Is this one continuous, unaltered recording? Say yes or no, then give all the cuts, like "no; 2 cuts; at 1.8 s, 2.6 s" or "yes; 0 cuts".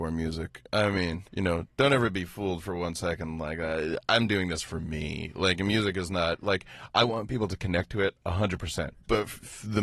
no; 1 cut; at 1.3 s